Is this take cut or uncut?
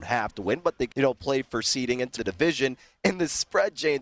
cut